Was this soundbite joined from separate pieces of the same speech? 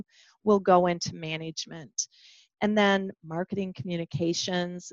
yes; 1 cut; at 3.2 s

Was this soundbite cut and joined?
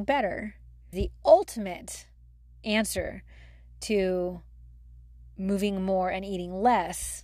yes; 1 cut; at 0.9 s

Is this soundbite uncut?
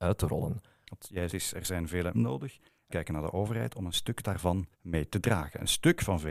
no; 4 cuts; at 1.3 s, 2.1 s, 2.9 s, 4.7 s

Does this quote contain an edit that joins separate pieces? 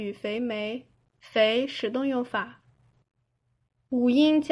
no; 0 cuts

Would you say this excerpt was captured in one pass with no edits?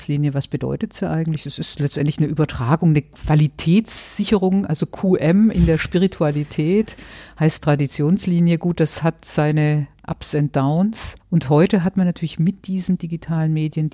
no; 1 cut; at 11.2 s

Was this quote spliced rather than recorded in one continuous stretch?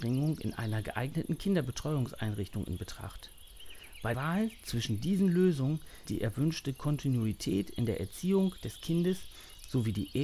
yes; 2 cuts; at 4.1 s, 6.0 s

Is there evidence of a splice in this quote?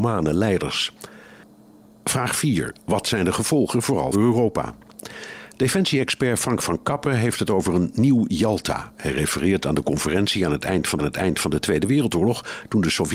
yes; 2 cuts; at 4.1 s, 11.0 s

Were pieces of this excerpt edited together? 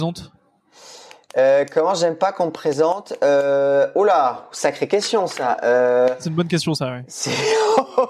no; 0 cuts

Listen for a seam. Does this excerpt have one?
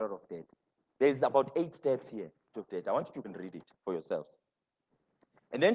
yes; 3 cuts; at 2.5 s, 3.2 s, 3.8 s

